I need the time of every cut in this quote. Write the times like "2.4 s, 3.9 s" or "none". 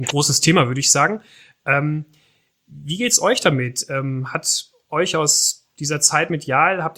none